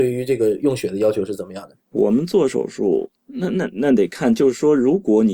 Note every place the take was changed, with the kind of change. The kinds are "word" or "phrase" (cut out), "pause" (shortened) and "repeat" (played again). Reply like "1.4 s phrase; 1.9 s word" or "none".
1.8 s pause; 3.2 s pause